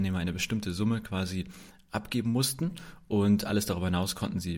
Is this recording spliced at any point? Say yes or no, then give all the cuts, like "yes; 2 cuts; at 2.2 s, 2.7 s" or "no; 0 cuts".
no; 0 cuts